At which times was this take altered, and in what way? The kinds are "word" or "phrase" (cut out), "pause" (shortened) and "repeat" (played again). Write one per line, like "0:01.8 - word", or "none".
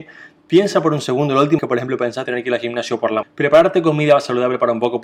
0:01.6 - word
0:02.3 - word
0:03.2 - word

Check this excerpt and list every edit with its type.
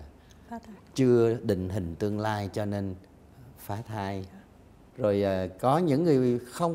0:04.9 - word

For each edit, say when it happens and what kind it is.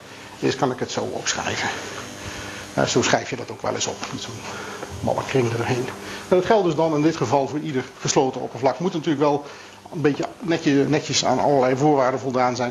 none

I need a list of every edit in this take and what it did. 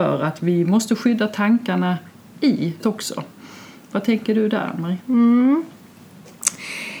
0:02.8 - word

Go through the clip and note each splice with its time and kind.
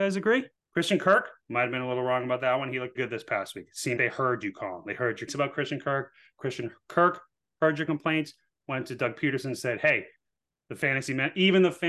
0:02.9 - word
0:04.0 - word
0:05.3 - word

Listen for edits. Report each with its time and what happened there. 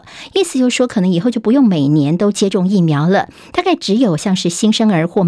none

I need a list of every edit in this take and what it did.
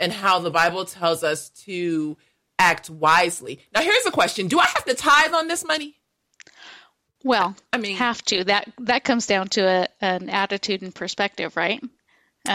none

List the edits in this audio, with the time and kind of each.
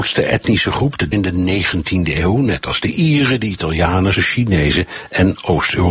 0:01.1 - phrase
0:04.1 - word

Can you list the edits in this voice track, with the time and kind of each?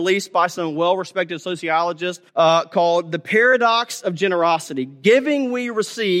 0:02.3 - pause

